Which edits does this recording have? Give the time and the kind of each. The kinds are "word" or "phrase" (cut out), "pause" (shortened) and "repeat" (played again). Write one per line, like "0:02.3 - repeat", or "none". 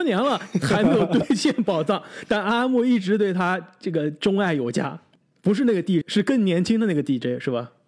0:06.0 - word